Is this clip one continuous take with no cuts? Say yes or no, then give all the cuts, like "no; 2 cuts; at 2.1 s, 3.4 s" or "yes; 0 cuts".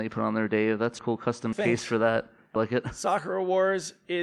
no; 3 cuts; at 1.0 s, 1.5 s, 2.6 s